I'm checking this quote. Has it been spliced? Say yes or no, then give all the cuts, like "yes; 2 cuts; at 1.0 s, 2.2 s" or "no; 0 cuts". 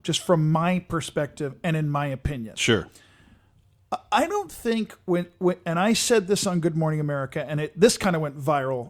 no; 0 cuts